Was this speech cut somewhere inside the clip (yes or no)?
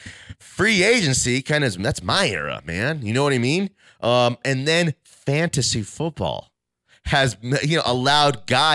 no